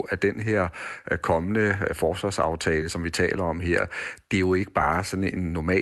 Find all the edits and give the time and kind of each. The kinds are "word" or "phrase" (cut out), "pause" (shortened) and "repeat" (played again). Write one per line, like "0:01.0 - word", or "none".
none